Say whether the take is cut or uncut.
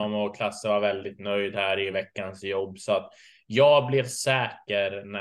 uncut